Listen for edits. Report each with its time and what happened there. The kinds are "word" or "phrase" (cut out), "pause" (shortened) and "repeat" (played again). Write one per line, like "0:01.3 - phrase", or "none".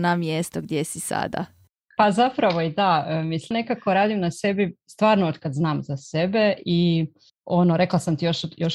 0:03.5 - word